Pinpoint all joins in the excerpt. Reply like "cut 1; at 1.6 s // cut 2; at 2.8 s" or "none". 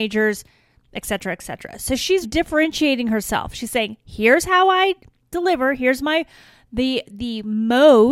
cut 1; at 2.2 s